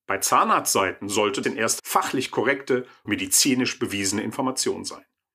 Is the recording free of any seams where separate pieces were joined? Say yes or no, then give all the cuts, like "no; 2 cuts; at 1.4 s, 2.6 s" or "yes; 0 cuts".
no; 3 cuts; at 1.4 s, 1.8 s, 3.1 s